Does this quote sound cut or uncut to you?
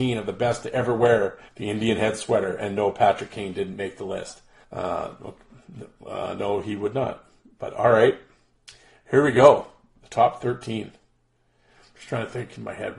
cut